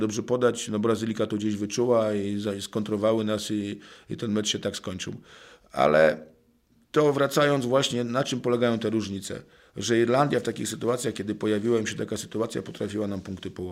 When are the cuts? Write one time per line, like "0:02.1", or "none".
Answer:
none